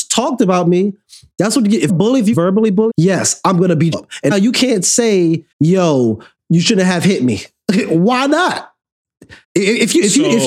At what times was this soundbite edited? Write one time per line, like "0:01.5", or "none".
0:01.9
0:02.3
0:02.9
0:03.9
0:04.3
0:05.5
0:09.4